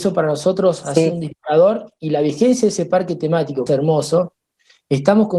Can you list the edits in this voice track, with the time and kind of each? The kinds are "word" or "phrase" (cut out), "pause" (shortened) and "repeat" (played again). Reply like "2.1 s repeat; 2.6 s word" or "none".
3.7 s phrase

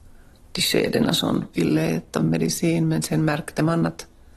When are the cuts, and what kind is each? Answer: 1.5 s phrase

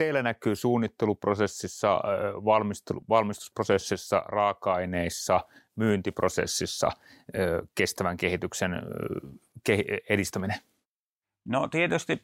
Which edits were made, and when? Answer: none

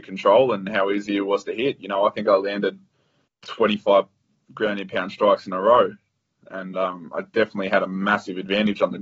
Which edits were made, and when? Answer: none

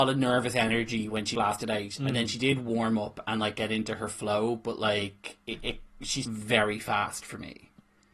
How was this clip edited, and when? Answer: 1.3 s word; 5.4 s pause; 6.2 s word

